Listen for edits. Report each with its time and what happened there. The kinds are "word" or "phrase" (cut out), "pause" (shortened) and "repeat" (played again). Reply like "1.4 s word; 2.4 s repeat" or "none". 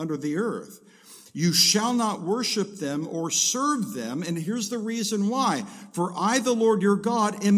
none